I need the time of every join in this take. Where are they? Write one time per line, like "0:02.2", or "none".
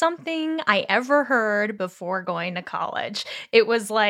none